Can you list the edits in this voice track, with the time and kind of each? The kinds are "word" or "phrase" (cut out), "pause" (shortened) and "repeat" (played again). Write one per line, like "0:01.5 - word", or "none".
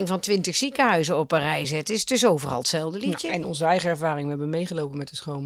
none